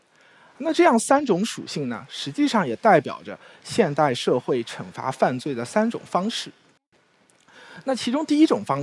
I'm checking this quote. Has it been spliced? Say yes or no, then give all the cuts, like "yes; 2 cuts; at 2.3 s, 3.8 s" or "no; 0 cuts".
no; 0 cuts